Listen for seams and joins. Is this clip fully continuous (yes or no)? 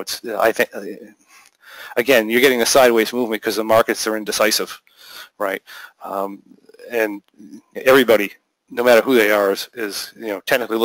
yes